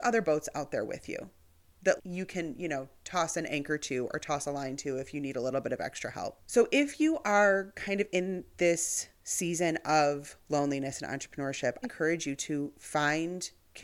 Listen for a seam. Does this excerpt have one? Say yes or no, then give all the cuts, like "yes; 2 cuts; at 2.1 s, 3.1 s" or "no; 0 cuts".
yes; 2 cuts; at 2.0 s, 11.8 s